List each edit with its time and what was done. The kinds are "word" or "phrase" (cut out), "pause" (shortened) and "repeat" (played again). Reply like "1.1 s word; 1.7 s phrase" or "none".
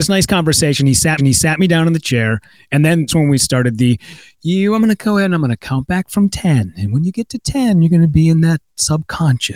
1.2 s repeat; 3.1 s word